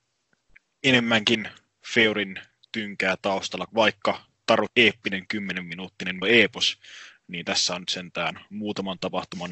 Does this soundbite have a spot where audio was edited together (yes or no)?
yes